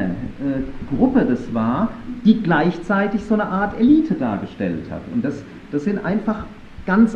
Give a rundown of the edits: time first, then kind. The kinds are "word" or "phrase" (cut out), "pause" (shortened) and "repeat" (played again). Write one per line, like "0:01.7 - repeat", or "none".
none

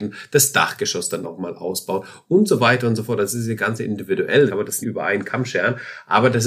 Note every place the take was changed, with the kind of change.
0:01.2 - word
0:04.5 - word
0:04.8 - word

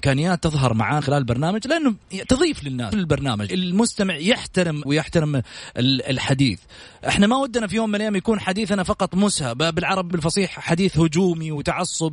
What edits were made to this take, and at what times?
0:01.0 - word
0:02.9 - word
0:03.5 - word
0:04.8 - word
0:10.1 - word

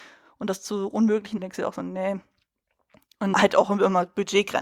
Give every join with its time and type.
0:01.4 - phrase
0:03.3 - word

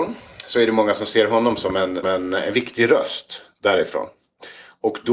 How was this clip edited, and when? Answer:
0:02.0 - word

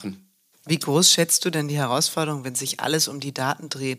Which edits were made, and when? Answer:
none

